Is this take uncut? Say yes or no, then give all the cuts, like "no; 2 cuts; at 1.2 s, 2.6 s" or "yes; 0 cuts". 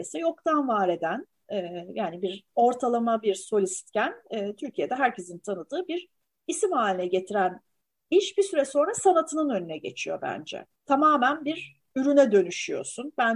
yes; 0 cuts